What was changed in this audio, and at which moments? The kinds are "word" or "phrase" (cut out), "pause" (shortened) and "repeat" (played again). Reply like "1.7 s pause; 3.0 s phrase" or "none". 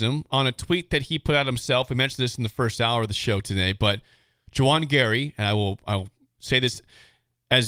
none